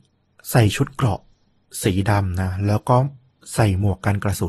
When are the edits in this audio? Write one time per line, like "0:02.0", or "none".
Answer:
none